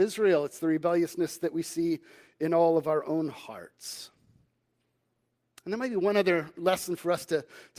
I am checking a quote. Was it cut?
no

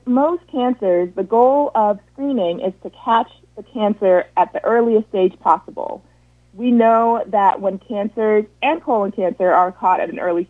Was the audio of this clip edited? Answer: no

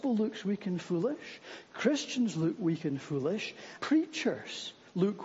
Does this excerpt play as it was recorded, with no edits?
no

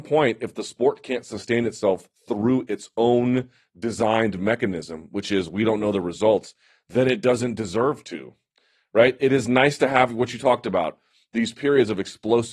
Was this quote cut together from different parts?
no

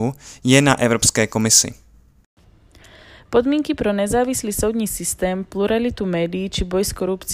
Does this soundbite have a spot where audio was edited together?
no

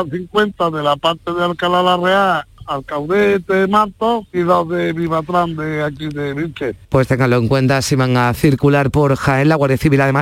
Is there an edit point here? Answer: yes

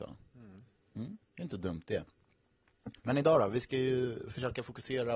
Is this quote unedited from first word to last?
no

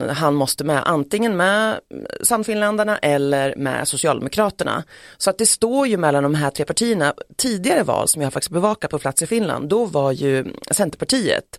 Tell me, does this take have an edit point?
no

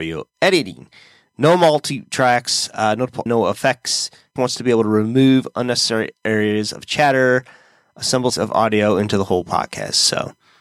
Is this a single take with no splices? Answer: no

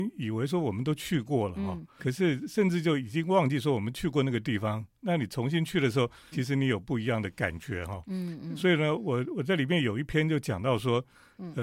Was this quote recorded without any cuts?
no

